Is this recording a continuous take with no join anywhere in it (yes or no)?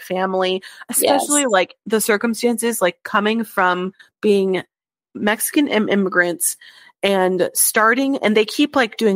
yes